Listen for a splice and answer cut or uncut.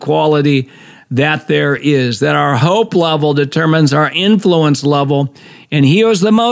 uncut